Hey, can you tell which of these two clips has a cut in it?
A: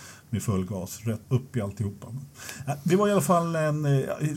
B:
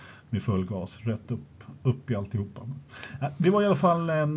A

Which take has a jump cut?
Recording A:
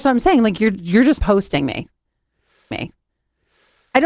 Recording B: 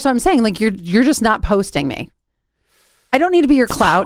A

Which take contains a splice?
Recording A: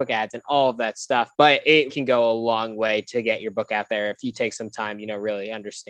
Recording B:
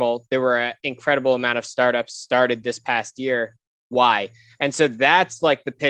A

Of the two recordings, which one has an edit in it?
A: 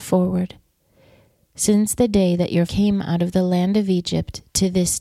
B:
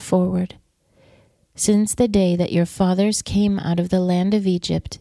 A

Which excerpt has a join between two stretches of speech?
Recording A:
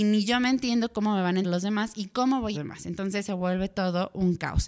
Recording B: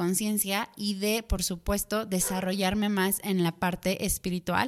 A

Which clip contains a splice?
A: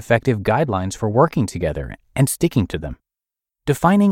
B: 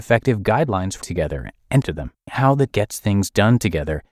B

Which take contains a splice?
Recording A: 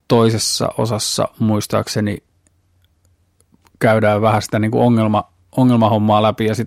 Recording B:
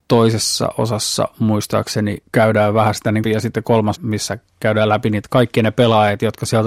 B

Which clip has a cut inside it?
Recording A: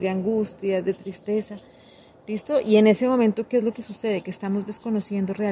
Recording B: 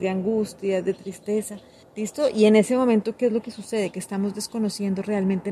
B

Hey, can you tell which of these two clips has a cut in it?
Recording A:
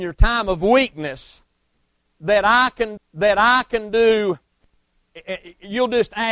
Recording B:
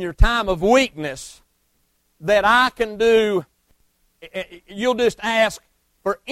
A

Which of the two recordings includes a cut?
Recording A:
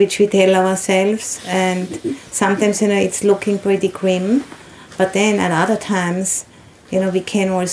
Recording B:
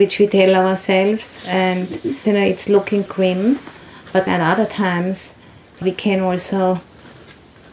B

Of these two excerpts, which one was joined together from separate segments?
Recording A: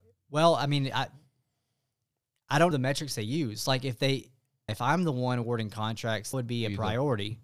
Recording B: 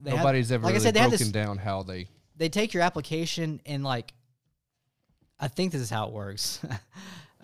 A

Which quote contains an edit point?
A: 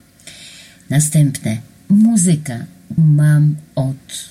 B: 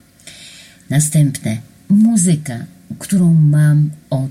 A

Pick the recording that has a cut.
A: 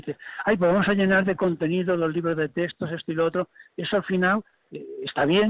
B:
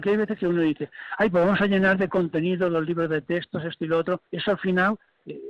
B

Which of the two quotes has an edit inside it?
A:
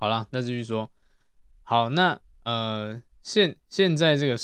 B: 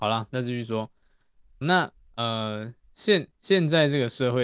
B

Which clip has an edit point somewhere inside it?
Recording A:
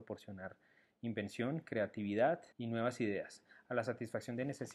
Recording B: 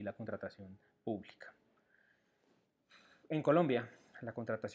A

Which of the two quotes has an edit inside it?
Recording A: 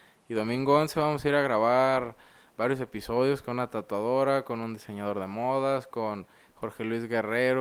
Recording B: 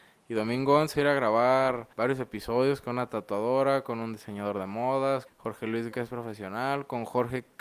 B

